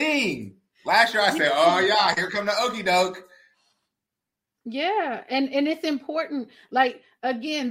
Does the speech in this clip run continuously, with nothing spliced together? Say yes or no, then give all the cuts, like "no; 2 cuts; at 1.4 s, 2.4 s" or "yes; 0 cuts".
yes; 0 cuts